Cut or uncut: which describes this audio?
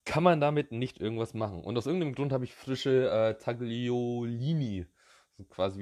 uncut